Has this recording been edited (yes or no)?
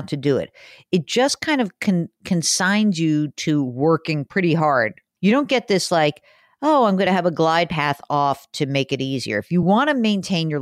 no